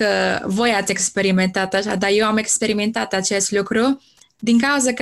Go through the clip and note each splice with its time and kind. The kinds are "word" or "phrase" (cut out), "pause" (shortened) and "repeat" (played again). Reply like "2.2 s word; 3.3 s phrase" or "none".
none